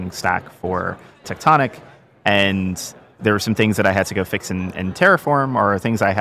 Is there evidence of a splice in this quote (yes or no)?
no